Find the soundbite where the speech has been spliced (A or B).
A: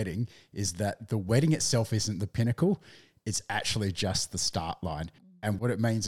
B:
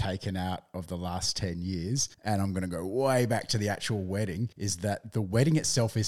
B